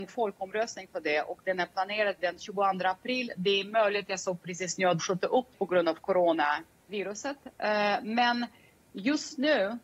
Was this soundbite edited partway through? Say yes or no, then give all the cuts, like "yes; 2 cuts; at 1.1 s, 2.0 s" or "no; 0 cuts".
yes; 4 cuts; at 2.2 s, 5.0 s, 5.5 s, 6.9 s